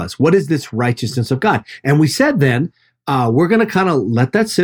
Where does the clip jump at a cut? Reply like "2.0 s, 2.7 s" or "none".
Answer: none

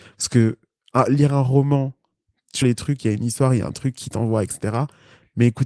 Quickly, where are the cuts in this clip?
2.6 s

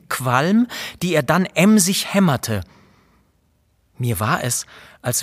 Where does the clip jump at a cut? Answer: none

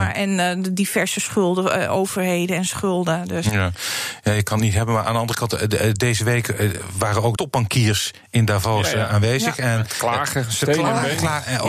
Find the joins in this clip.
7.4 s

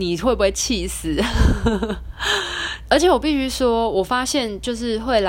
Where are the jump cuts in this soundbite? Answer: 2.9 s

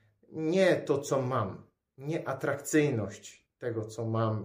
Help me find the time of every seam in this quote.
none

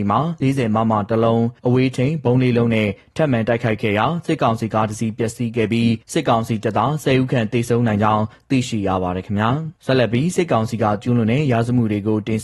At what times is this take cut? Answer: 1.6 s, 6.0 s, 9.8 s

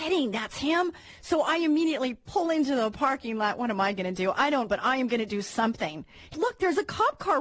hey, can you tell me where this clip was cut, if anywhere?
4.7 s, 6.3 s

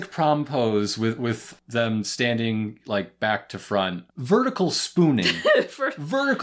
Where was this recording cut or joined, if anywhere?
4.1 s

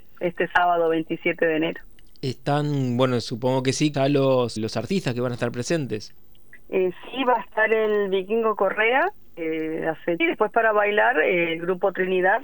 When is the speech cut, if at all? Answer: 3.9 s, 4.6 s, 10.2 s

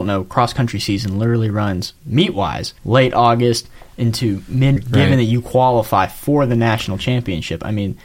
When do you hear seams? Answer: 2.0 s, 2.8 s, 4.8 s

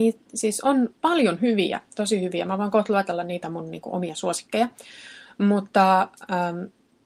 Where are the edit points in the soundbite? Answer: 3.4 s

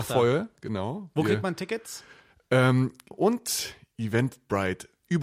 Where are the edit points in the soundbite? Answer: 3.1 s

